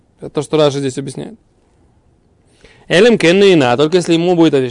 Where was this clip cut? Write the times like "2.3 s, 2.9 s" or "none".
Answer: none